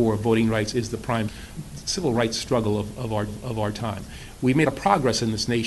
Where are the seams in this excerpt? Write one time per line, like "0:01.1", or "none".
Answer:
0:03.3
0:04.7